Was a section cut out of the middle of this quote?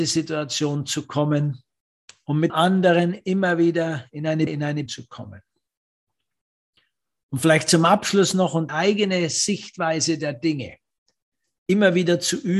yes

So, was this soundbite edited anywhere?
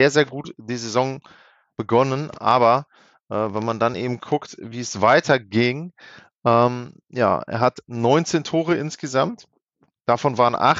no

